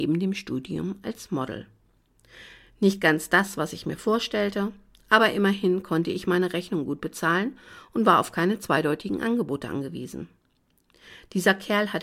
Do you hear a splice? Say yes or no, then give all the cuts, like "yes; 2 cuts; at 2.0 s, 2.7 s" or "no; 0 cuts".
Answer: no; 0 cuts